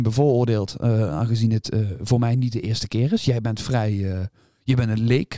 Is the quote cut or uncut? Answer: uncut